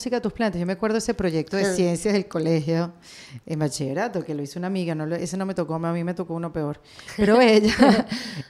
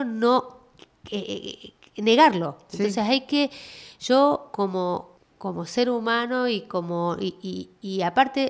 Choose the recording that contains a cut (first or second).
second